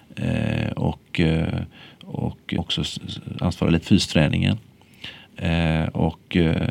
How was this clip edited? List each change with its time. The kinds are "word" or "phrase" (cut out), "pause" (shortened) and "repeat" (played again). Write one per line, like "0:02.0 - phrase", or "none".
0:02.6 - word
0:03.8 - word